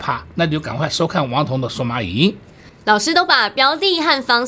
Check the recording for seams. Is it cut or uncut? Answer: uncut